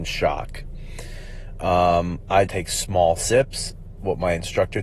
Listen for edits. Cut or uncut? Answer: cut